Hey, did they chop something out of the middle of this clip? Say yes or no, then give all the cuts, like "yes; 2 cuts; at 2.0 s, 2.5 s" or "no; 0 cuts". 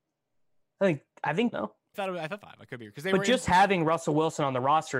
yes; 3 cuts; at 1.5 s, 1.9 s, 2.4 s